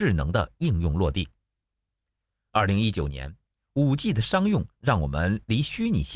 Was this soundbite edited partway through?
no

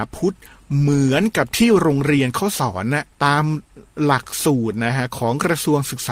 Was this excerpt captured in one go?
no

